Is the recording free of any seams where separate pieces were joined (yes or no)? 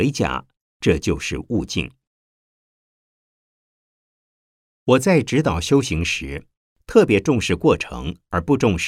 yes